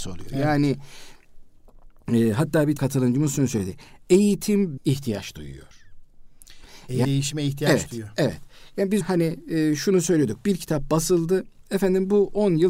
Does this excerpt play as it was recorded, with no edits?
no; 4 cuts; at 2.8 s, 4.8 s, 7.0 s, 9.0 s

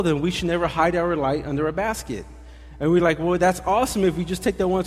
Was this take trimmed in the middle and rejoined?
no; 0 cuts

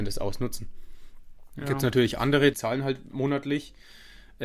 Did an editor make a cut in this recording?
yes; 1 cut; at 2.5 s

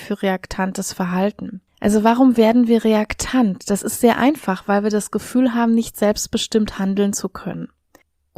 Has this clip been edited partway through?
yes; 1 cut; at 1.7 s

